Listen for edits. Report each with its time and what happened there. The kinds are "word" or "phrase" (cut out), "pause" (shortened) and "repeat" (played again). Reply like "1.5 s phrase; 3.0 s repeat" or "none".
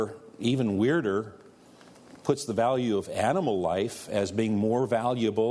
none